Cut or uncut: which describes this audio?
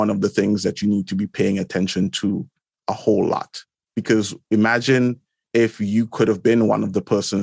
uncut